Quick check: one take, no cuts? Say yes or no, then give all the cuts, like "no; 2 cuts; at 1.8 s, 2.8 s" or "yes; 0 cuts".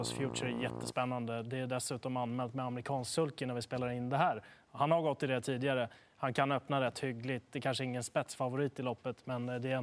yes; 0 cuts